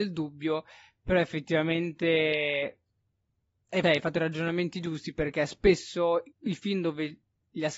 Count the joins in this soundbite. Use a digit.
2